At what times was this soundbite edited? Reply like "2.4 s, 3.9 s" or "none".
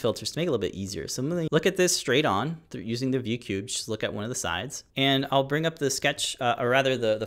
1.5 s, 4.9 s